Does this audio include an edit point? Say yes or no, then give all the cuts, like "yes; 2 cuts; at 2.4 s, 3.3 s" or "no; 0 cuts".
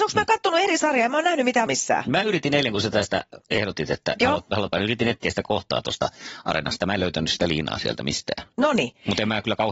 yes; 2 cuts; at 1.7 s, 4.7 s